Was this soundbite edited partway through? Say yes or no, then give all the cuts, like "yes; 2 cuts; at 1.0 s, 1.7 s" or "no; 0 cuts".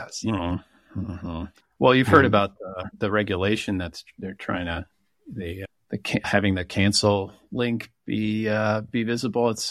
no; 0 cuts